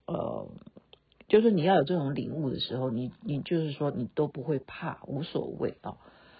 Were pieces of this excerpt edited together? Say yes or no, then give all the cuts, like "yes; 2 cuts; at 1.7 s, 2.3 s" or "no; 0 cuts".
no; 0 cuts